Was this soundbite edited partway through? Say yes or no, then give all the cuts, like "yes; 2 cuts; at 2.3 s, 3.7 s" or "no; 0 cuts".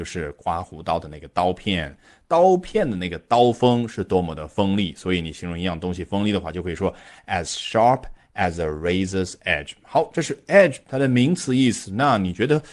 no; 0 cuts